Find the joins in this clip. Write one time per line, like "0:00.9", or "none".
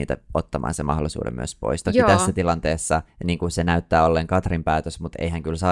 0:03.1